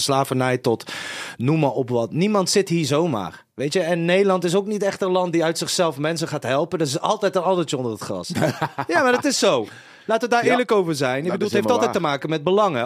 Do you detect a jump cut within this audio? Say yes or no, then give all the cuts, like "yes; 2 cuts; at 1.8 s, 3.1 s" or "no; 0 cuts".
no; 0 cuts